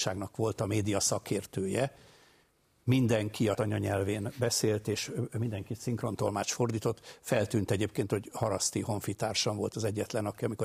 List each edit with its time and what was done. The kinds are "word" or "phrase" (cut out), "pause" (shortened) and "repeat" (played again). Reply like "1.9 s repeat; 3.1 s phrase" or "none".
3.5 s word